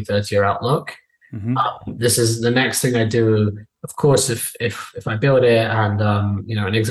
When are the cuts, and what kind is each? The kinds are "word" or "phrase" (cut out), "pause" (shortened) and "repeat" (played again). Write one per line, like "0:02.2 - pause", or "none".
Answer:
none